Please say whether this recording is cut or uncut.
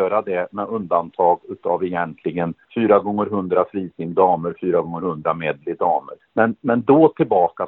uncut